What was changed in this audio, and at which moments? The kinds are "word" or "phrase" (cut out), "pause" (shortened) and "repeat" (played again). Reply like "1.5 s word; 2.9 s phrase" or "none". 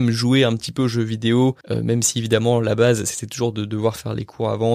1.6 s pause